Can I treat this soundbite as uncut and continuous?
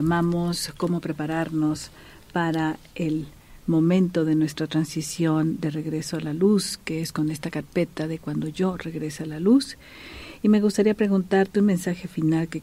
yes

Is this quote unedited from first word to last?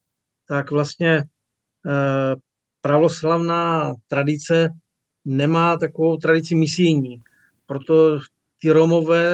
yes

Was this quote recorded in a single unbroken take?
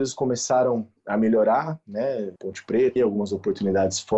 no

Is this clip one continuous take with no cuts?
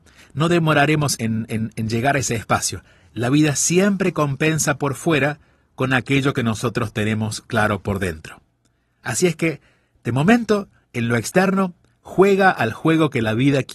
no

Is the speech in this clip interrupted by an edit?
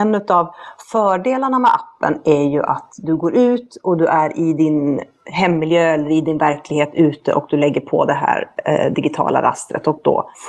no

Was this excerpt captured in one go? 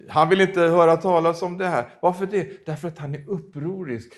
yes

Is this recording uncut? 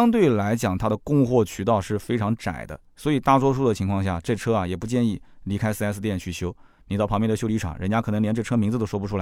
yes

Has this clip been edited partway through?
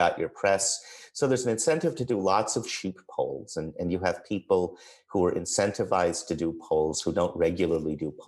no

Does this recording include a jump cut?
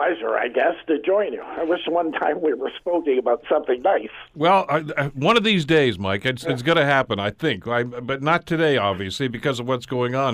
no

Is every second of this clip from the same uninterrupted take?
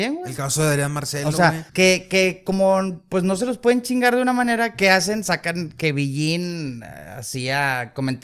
no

